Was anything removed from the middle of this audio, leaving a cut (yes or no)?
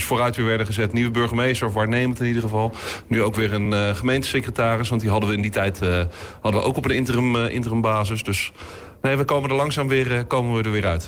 no